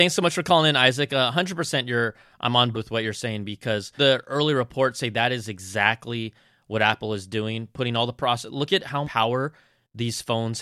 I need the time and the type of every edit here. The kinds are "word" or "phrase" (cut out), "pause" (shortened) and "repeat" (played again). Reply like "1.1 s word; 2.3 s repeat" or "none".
2.7 s word; 4.0 s word; 9.0 s word